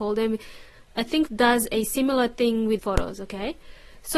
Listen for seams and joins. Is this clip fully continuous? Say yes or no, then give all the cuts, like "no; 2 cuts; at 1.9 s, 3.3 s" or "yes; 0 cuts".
no; 2 cuts; at 1.3 s, 2.8 s